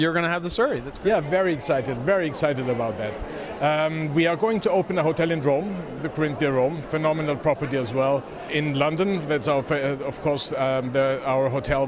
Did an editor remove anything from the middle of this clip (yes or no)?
no